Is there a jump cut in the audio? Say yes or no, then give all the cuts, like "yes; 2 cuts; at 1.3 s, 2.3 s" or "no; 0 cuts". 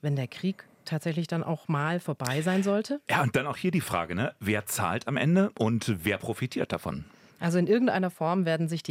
no; 0 cuts